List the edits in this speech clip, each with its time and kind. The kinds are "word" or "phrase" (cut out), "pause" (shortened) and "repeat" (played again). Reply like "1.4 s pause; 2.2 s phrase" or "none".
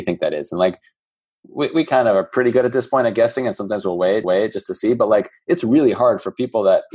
4.2 s repeat